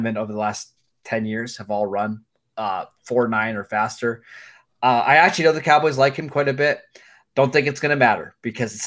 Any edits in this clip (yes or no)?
no